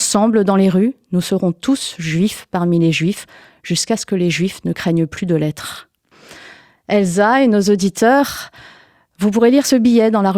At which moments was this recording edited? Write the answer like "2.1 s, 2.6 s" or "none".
none

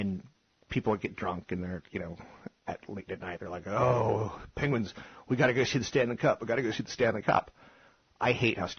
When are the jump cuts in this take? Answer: 3.1 s

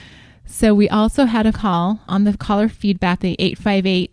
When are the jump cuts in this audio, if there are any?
1.5 s, 2.1 s, 3.2 s

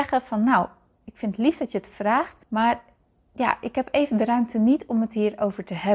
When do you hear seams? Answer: 2.4 s

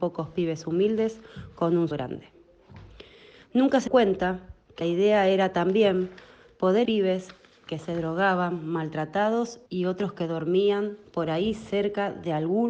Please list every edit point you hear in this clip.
1.9 s, 3.9 s, 4.8 s, 6.8 s, 9.7 s

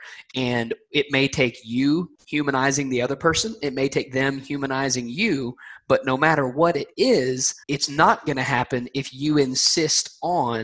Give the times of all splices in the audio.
2.1 s, 7.6 s

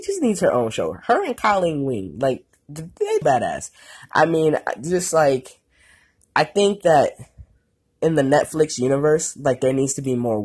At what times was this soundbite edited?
3.2 s

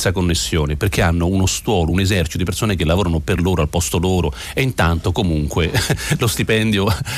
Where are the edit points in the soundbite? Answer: none

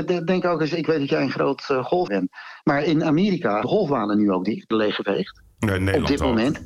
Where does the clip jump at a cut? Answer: 2.1 s, 3.6 s, 4.7 s

